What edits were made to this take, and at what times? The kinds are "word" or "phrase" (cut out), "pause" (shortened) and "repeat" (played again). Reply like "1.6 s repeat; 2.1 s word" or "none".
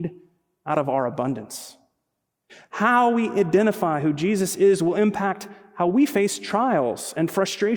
none